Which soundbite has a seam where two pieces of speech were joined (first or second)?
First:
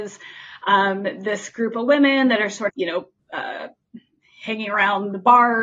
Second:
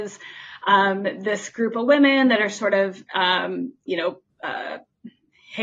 first